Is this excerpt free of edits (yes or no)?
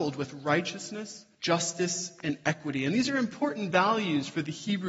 no